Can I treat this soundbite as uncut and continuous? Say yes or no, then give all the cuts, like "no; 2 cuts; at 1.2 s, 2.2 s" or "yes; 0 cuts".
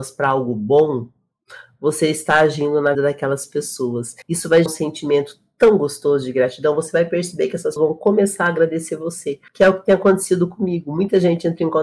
no; 5 cuts; at 2.9 s, 4.2 s, 4.7 s, 7.8 s, 9.5 s